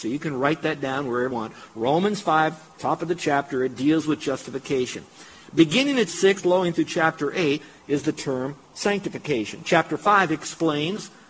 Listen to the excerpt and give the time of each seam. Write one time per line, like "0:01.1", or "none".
0:01.3
0:06.1
0:06.4